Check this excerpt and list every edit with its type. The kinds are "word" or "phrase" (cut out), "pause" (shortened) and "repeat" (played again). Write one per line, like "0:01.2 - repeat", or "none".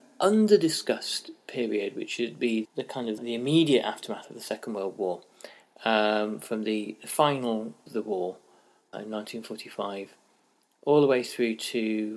0:02.6 - word
0:03.2 - word
0:07.9 - word
0:08.9 - word